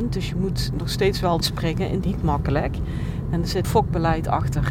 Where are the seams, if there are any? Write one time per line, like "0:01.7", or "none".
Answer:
0:01.4
0:02.0
0:03.6